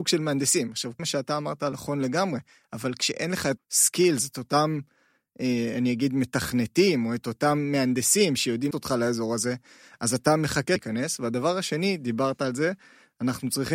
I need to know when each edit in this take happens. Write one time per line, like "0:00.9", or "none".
0:01.0
0:01.7
0:03.6
0:08.7
0:10.8

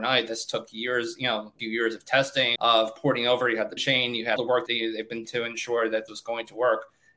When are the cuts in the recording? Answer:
0:01.6
0:02.6
0:03.8
0:04.4
0:04.7
0:05.2
0:06.1

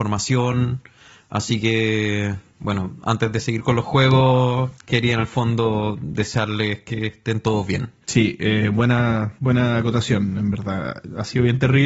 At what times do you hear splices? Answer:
0:02.5
0:04.8
0:08.0
0:09.4

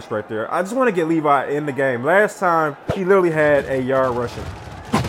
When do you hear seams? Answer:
0:02.8

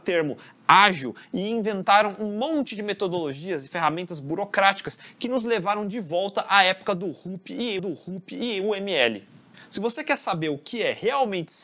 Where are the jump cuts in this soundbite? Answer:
0:07.8

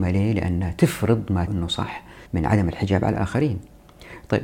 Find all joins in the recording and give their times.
0:01.5
0:02.3

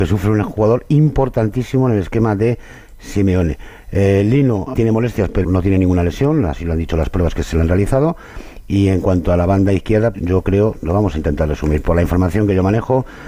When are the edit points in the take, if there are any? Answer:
0:04.8
0:05.4
0:10.1

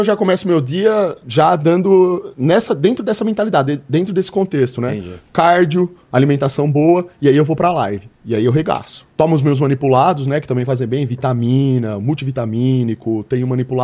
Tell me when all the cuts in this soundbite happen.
0:08.1
0:09.1

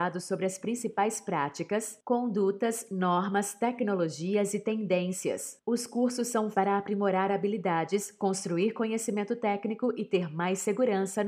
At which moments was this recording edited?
0:06.5

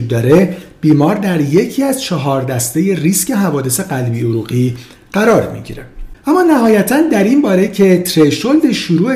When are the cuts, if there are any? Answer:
none

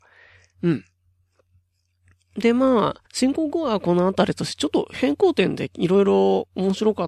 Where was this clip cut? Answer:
0:03.1

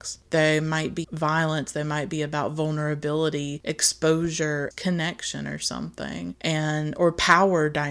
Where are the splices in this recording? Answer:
0:01.0
0:04.7

